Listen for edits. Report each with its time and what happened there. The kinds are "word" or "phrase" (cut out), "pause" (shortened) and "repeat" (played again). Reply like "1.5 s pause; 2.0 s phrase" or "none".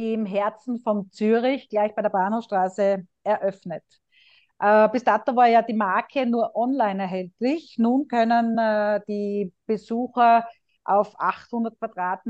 none